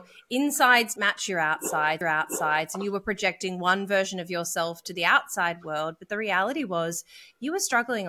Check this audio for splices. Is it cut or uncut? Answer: cut